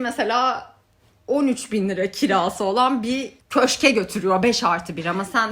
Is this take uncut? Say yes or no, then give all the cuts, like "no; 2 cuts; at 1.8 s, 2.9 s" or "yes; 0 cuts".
no; 1 cut; at 3.4 s